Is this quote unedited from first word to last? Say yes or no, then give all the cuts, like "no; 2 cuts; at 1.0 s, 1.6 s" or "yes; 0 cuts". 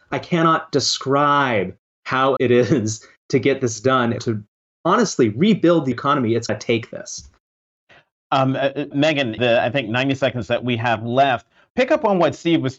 no; 6 cuts; at 2.4 s, 4.2 s, 5.9 s, 6.5 s, 8.9 s, 9.4 s